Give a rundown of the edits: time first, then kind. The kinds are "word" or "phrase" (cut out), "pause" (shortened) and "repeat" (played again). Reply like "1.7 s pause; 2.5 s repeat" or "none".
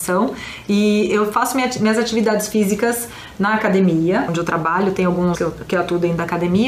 4.3 s word; 5.3 s word

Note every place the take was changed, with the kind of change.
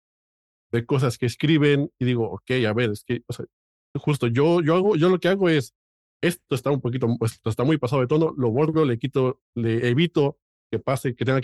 none

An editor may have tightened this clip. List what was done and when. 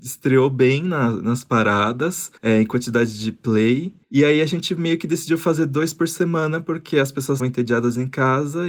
2.4 s pause; 4.0 s pause; 7.4 s word

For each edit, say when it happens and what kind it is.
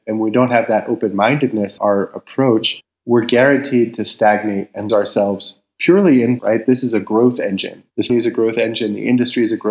1.8 s word; 2.8 s word; 4.9 s word; 6.4 s word; 8.1 s word

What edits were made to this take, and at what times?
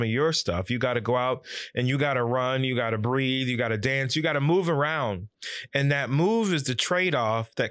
none

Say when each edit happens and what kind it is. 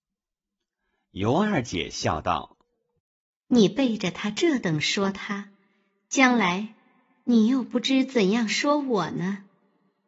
none

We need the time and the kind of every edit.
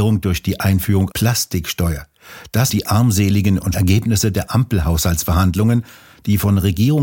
1.1 s word; 2.7 s word; 3.7 s word

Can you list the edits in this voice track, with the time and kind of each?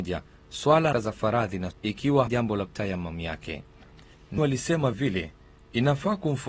0.9 s word; 1.7 s word; 2.3 s word; 2.7 s word; 4.4 s word; 4.9 s word

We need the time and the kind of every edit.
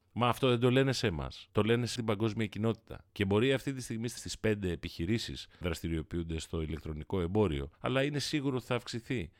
2.0 s word; 3.1 s pause; 4.2 s phrase; 5.6 s word; 7.7 s pause

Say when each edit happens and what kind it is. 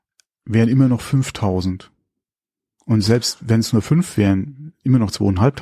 none

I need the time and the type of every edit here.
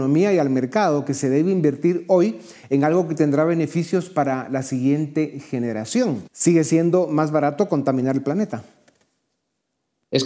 6.3 s pause

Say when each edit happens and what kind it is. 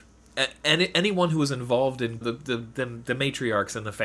2.2 s phrase

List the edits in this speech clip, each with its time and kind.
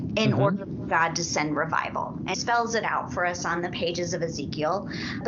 2.3 s word

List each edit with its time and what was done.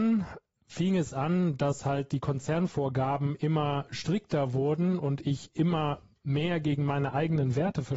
none

